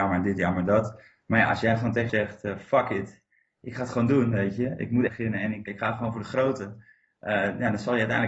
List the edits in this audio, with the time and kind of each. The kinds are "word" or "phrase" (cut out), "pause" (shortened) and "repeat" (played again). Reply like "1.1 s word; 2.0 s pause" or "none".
2.1 s word; 5.1 s word; 5.7 s word